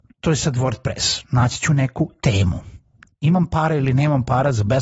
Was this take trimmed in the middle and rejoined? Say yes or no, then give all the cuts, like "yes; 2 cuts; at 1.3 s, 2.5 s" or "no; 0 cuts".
no; 0 cuts